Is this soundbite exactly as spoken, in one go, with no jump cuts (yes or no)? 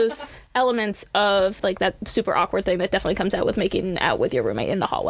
yes